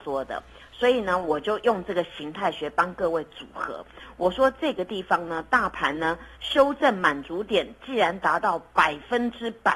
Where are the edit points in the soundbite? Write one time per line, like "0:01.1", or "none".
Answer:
0:06.3